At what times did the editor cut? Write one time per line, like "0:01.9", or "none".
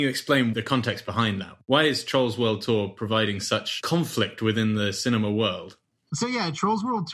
none